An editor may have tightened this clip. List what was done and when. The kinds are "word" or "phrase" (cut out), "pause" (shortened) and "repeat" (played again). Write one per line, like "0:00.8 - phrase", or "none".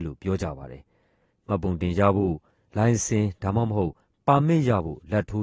none